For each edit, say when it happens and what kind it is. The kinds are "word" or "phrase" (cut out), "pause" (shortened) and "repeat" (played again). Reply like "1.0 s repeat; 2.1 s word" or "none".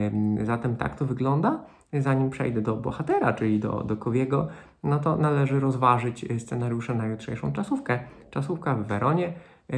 none